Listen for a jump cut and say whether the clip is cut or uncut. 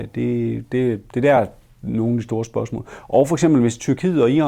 uncut